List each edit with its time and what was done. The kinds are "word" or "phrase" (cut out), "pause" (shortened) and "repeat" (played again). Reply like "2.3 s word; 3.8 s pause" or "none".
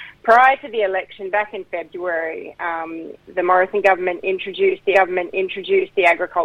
3.2 s pause; 4.9 s repeat